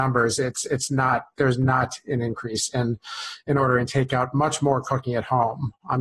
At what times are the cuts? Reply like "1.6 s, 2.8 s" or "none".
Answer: none